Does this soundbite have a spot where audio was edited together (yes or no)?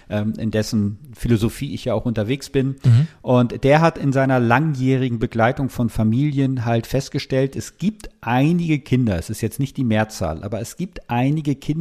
no